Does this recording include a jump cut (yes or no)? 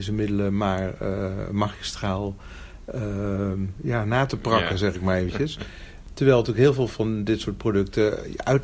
no